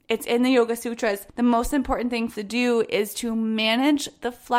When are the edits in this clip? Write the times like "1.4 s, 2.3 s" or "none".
1.3 s, 2.3 s